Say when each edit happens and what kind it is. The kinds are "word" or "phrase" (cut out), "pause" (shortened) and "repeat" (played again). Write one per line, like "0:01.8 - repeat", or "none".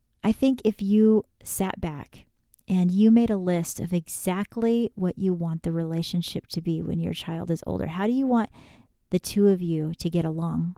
none